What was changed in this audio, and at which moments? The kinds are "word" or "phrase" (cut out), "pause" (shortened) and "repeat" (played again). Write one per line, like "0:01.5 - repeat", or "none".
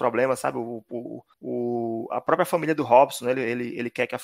0:01.3 - pause